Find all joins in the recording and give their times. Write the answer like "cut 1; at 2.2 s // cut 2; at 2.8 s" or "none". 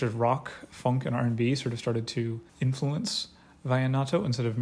cut 1; at 2.5 s

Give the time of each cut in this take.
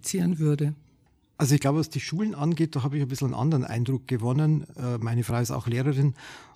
none

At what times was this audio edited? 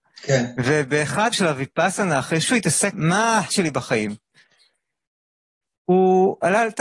cut 1; at 1.3 s // cut 2; at 2.4 s // cut 3; at 2.9 s // cut 4; at 3.5 s

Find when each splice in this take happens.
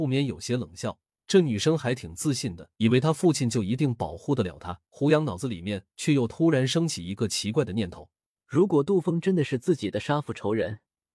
cut 1; at 1.1 s // cut 2; at 2.7 s // cut 3; at 4.9 s // cut 4; at 8.3 s

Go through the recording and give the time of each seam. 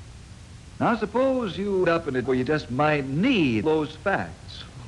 cut 1; at 1.8 s // cut 2; at 2.2 s // cut 3; at 3.6 s

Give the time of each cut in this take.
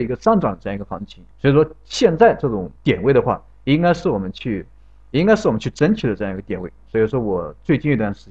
cut 1; at 1.3 s // cut 2; at 2.8 s

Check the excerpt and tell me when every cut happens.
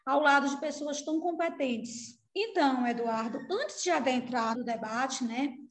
cut 1; at 2.3 s // cut 2; at 4.5 s

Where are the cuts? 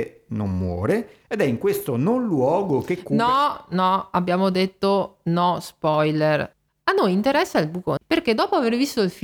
cut 1; at 8.0 s

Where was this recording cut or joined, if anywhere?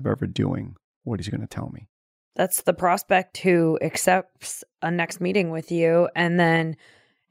none

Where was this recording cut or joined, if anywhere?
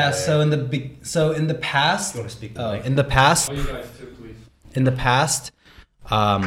cut 1; at 2.6 s // cut 2; at 3.5 s

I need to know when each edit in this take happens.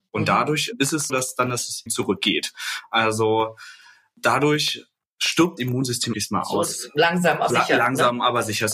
cut 1; at 1.1 s // cut 2; at 1.9 s // cut 3; at 5.6 s // cut 4; at 6.1 s // cut 5; at 7.5 s

